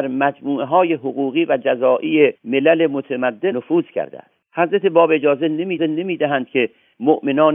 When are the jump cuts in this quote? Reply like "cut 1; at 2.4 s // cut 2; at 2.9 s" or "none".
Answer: cut 1; at 2.4 s // cut 2; at 3.5 s // cut 3; at 5.8 s